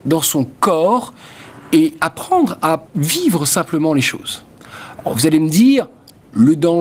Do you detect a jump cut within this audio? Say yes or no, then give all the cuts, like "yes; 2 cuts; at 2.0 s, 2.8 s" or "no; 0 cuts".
yes; 1 cut; at 2.9 s